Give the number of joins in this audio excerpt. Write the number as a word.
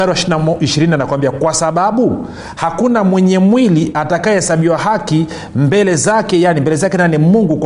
zero